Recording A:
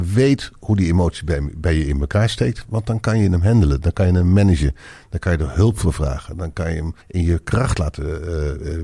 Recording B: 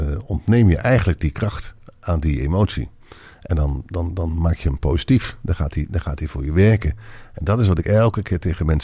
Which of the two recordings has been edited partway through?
A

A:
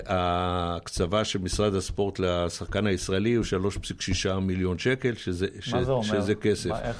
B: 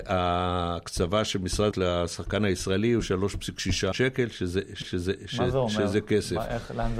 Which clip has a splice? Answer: B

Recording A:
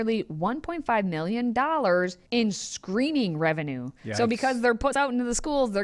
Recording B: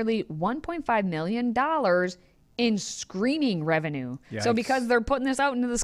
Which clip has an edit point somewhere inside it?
A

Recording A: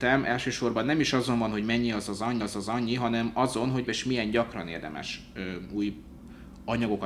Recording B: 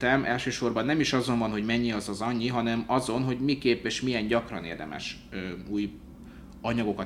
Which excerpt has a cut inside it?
A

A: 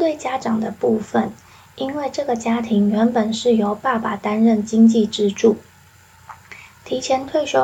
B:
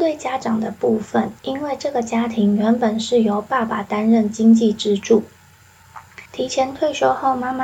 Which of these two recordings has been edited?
B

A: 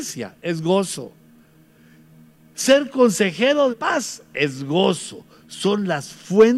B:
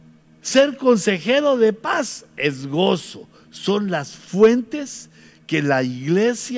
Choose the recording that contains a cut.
A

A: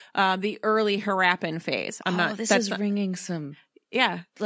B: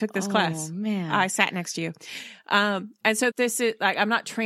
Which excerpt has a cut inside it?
B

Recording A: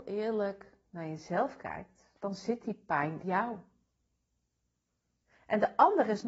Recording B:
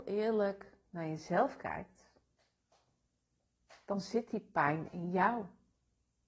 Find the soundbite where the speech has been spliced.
A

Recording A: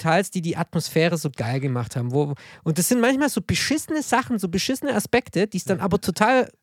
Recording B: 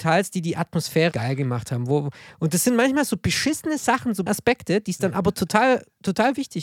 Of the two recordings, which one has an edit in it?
B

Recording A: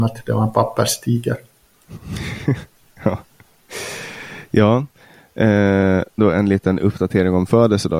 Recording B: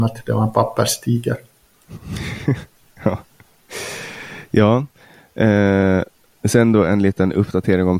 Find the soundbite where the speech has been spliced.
A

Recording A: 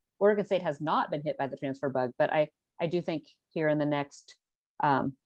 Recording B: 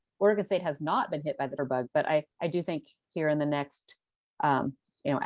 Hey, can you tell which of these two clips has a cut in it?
B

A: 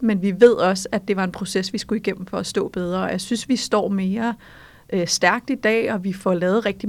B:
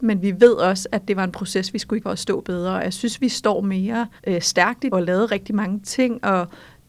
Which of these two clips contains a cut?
B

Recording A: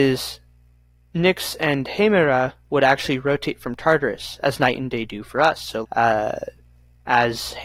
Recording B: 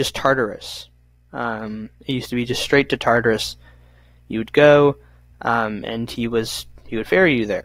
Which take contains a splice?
A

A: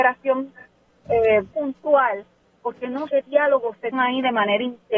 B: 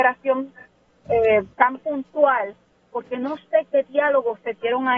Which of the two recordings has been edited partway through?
A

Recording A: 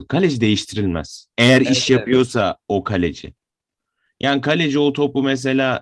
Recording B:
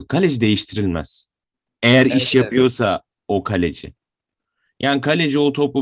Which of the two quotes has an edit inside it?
A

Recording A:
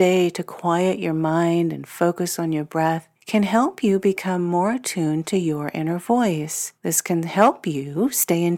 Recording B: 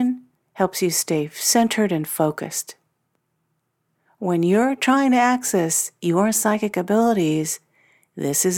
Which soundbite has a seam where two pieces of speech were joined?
A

